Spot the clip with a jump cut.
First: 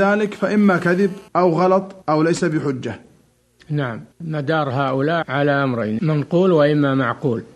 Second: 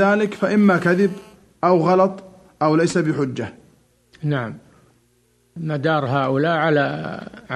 first; 5 cuts; at 1.3 s, 2.0 s, 4.1 s, 5.2 s, 6.0 s

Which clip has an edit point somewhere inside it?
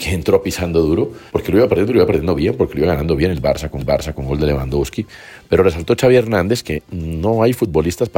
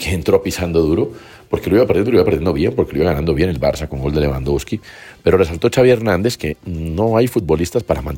first; 2 cuts; at 1.3 s, 3.8 s

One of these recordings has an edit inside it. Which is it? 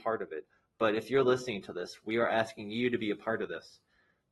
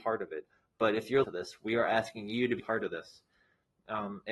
second; 2 cuts; at 1.2 s, 2.6 s

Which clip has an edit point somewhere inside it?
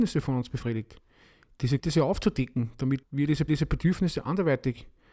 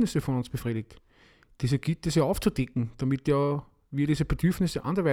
first; 3 cuts; at 1.8 s, 3.0 s, 3.5 s

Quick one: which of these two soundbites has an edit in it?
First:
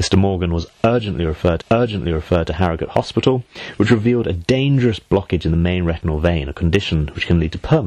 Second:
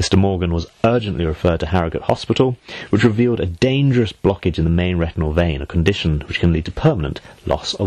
first; 1 cut; at 1.6 s

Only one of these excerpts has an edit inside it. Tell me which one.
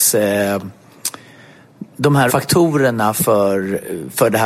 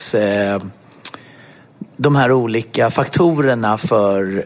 first; 1 cut; at 2.3 s

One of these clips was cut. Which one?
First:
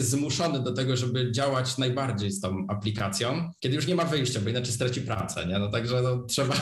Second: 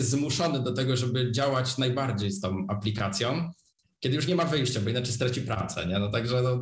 first; 1 cut; at 3.6 s

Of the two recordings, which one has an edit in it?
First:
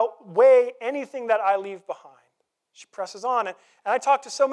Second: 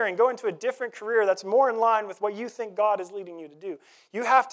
first; 1 cut; at 2.5 s

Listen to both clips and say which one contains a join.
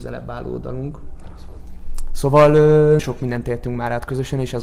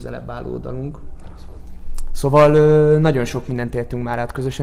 first; 1 cut; at 3.0 s

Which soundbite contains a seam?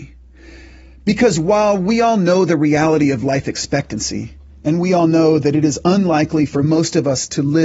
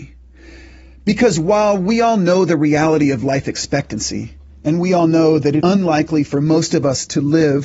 second; 1 cut; at 5.6 s

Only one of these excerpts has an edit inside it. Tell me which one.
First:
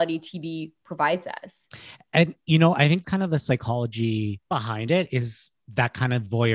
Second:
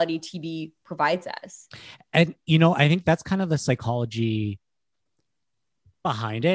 first; 2 cuts; at 3.0 s, 4.5 s

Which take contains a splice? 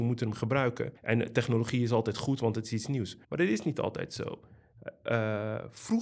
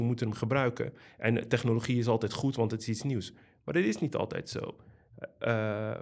first; 2 cuts; at 1.0 s, 3.2 s

